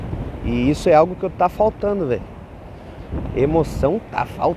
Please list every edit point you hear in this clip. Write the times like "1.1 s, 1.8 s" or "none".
none